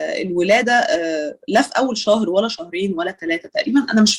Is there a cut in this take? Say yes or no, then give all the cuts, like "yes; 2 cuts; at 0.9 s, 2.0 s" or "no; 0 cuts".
no; 0 cuts